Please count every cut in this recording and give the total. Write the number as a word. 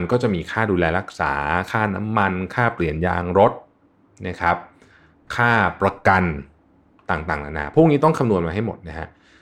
zero